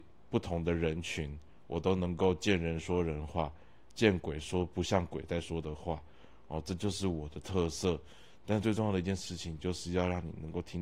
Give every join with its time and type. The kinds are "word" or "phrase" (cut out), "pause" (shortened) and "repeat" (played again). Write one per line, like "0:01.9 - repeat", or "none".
none